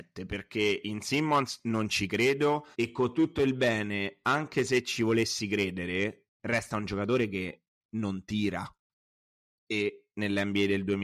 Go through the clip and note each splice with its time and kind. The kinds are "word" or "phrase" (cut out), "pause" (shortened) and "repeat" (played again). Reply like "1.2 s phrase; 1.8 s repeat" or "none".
2.7 s pause